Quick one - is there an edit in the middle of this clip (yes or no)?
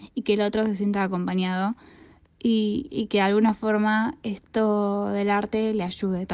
no